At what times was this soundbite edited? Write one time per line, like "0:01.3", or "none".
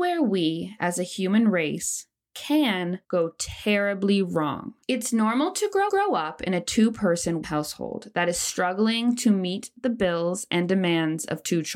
0:03.0
0:04.8
0:05.9
0:07.4